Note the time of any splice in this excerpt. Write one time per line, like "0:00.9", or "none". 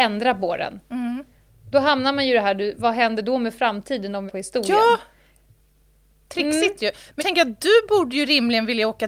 0:04.3
0:07.2

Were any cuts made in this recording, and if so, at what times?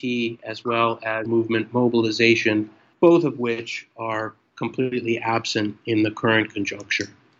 0:01.3

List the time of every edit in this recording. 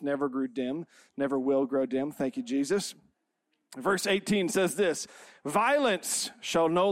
none

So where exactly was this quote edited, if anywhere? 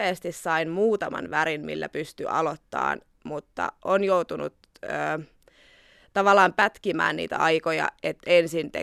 none

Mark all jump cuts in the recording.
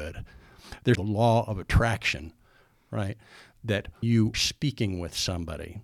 0:00.9
0:04.0
0:04.3

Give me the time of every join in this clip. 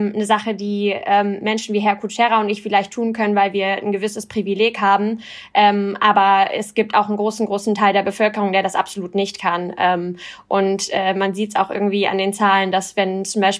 none

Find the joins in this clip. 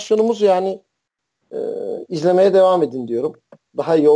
none

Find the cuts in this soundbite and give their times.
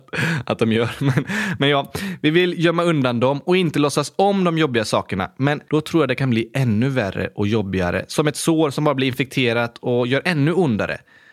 0:05.7

